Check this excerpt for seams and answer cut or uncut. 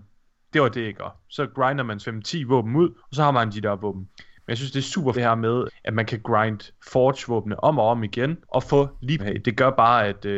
cut